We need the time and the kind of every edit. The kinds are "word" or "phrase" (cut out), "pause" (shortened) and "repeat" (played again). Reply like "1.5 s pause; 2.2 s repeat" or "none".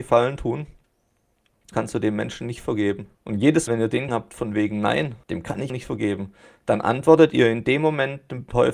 1.7 s word; 3.1 s pause; 3.7 s word; 4.1 s word; 5.2 s pause; 5.7 s word